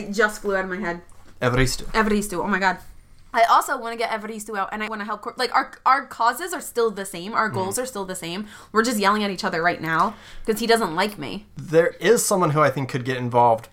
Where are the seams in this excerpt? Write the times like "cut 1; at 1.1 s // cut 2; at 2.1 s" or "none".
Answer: cut 1; at 4.9 s // cut 2; at 11.5 s

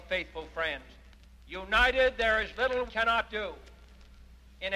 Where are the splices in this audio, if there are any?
cut 1; at 1.1 s // cut 2; at 2.9 s

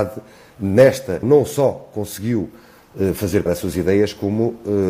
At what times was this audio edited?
cut 1; at 1.2 s // cut 2; at 3.5 s

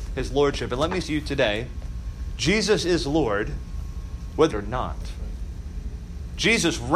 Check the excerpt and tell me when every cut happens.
cut 1; at 1.0 s // cut 2; at 4.5 s

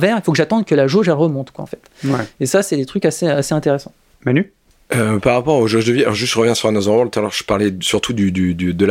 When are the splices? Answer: none

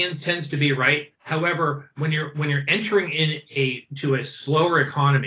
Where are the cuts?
cut 1; at 1.2 s

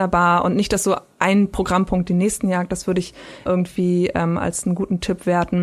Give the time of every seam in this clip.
cut 1; at 3.5 s

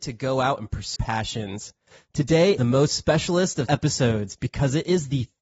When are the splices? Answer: cut 1; at 1.0 s // cut 2; at 2.6 s // cut 3; at 3.7 s

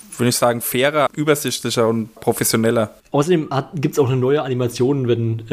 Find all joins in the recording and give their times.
cut 1; at 1.1 s // cut 2; at 2.2 s // cut 3; at 3.0 s

